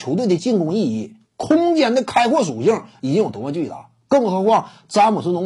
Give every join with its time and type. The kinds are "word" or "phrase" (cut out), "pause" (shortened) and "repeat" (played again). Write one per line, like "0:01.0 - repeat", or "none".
0:01.2 - pause